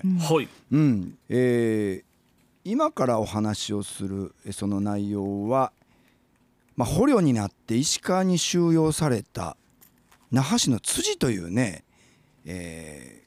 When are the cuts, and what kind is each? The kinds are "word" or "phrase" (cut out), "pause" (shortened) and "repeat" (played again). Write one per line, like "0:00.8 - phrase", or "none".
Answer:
0:01.2 - pause